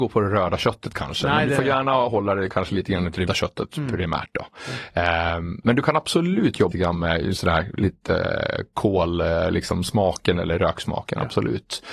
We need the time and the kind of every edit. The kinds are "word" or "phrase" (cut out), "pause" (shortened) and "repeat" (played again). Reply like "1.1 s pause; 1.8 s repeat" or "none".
3.3 s word; 6.7 s word

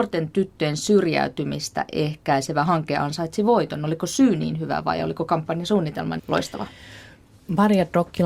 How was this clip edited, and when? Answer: 6.2 s word

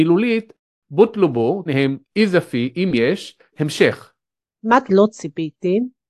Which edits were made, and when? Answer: 1.7 s word; 2.0 s word; 3.5 s word; 4.9 s word

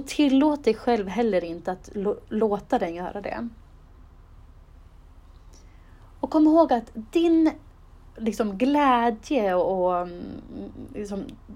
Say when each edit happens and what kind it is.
none

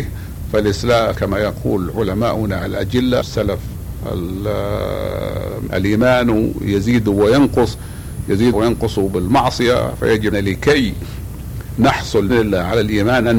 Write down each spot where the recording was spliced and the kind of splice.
1.1 s word; 3.2 s word; 5.7 s word; 8.5 s word; 10.3 s word; 12.3 s word

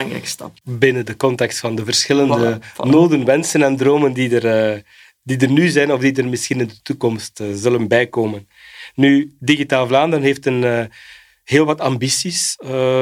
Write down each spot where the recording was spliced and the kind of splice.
none

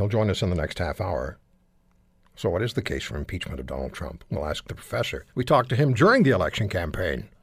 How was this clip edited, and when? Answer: 5.3 s pause

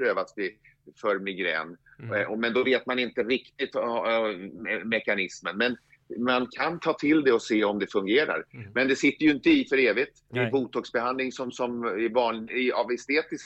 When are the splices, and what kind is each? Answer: 10.3 s pause

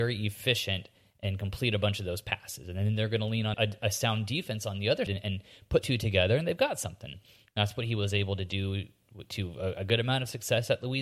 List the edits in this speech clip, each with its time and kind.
3.5 s word; 5.1 s word; 5.8 s word

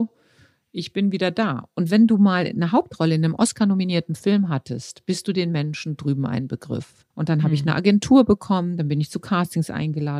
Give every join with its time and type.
7.1 s pause

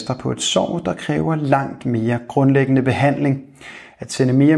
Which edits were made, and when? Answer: none

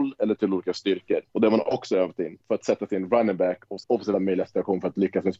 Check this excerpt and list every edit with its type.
1.3 s pause; 2.4 s pause; 3.8 s word; 4.1 s phrase

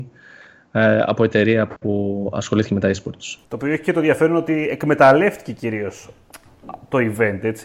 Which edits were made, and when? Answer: 3.4 s pause

